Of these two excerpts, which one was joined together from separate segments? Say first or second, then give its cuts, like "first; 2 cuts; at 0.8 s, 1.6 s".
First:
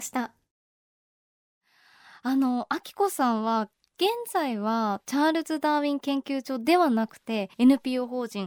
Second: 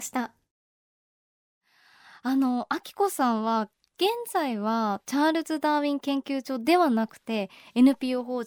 first; 1 cut; at 7.5 s